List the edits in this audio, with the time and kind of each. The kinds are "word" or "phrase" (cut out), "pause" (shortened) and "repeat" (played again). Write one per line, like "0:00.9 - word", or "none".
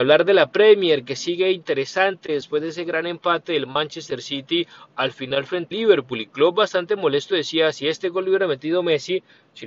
0:05.7 - word